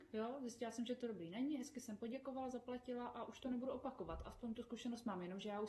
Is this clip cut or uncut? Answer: uncut